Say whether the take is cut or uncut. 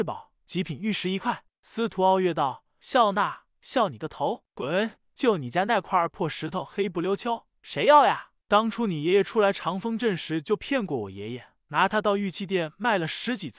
uncut